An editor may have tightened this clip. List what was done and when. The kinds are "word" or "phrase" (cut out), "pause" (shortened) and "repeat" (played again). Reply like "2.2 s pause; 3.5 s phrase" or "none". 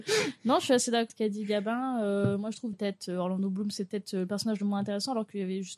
1.1 s word; 2.7 s phrase